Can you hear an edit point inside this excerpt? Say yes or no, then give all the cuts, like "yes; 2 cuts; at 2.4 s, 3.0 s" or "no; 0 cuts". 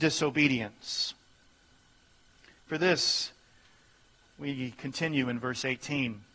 no; 0 cuts